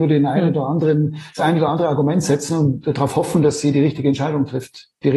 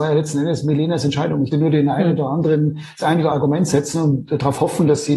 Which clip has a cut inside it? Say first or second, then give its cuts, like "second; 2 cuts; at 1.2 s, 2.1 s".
second; 2 cuts; at 1.5 s, 3.3 s